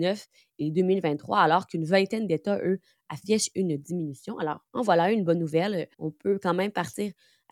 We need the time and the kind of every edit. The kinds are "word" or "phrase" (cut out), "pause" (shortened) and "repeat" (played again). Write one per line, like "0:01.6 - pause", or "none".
0:04.7 - pause
0:05.9 - pause